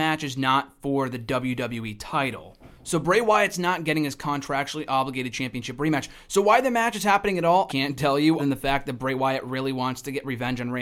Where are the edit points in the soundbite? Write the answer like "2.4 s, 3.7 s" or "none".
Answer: 7.7 s, 8.4 s